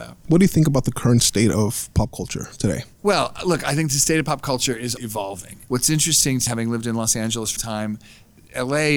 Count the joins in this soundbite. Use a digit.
4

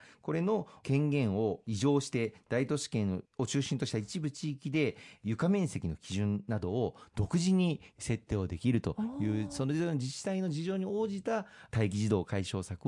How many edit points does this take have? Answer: 1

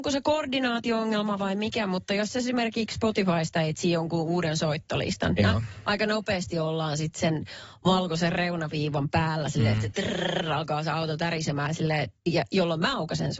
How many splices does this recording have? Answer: 1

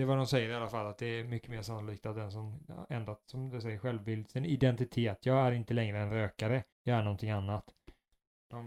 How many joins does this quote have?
1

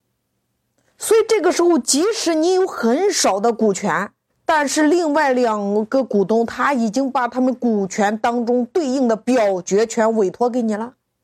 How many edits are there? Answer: 1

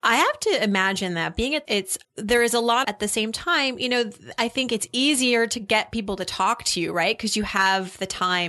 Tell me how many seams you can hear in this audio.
3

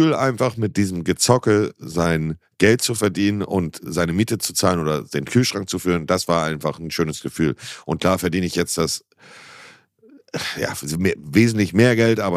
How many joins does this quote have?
0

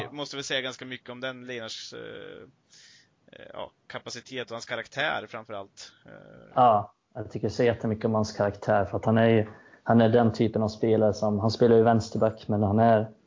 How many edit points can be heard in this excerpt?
0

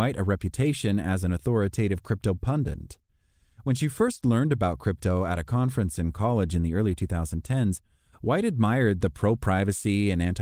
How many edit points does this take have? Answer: 0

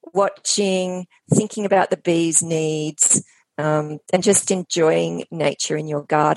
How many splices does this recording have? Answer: 0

